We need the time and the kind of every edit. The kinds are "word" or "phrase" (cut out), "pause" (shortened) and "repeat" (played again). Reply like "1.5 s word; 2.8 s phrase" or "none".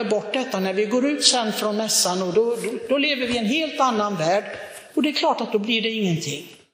none